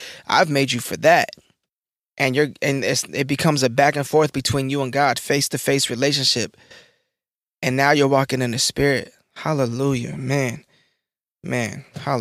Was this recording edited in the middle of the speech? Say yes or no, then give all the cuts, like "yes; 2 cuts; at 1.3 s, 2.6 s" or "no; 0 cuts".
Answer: no; 0 cuts